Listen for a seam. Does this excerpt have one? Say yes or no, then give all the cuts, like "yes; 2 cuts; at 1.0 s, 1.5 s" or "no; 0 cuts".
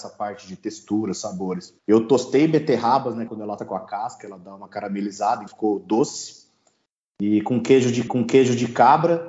yes; 5 cuts; at 1.8 s, 3.3 s, 3.6 s, 5.5 s, 8.1 s